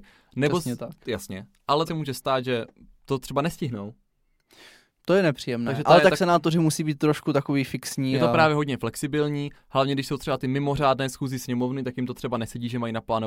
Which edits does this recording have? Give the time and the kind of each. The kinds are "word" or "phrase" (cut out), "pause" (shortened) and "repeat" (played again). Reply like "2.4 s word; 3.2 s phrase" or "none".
1.9 s word